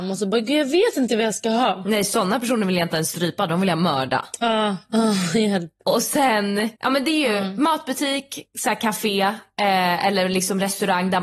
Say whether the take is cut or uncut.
cut